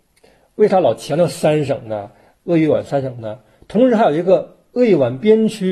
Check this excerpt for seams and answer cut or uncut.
uncut